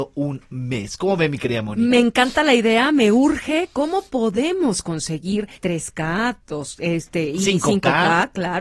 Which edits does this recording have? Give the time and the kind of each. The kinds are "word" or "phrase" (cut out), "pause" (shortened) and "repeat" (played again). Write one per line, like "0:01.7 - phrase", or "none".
0:05.5 - pause